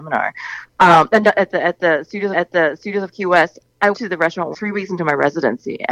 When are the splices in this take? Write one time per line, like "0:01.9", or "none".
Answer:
0:02.3
0:03.9
0:04.5